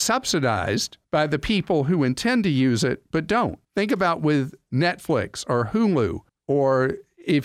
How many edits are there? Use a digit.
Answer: 3